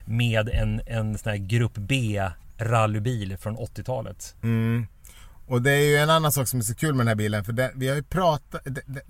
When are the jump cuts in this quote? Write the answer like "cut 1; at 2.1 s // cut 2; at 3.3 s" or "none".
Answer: cut 1; at 4.4 s